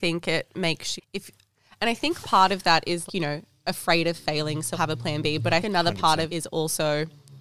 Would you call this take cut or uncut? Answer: cut